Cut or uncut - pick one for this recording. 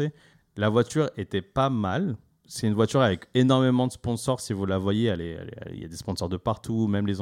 uncut